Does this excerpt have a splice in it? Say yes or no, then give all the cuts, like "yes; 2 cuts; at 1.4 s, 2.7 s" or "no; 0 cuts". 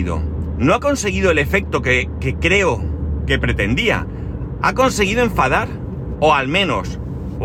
no; 0 cuts